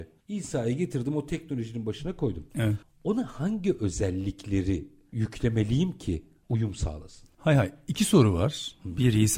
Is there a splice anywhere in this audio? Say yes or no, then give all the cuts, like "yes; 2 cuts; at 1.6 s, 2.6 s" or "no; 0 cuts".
no; 0 cuts